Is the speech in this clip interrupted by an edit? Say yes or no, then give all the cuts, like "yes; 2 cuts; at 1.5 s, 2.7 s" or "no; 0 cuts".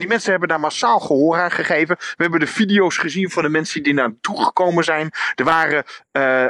no; 0 cuts